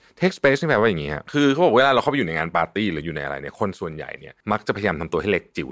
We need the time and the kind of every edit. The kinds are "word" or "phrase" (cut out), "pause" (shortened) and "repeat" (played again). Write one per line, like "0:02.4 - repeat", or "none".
0:04.4 - pause